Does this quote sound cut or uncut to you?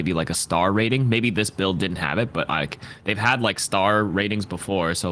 uncut